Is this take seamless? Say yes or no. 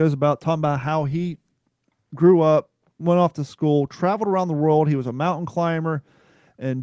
yes